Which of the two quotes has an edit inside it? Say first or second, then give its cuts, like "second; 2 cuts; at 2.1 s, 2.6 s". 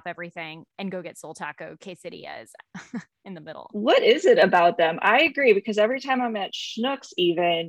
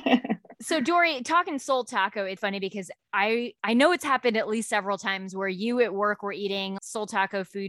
second; 3 cuts; at 2.4 s, 3.6 s, 6.8 s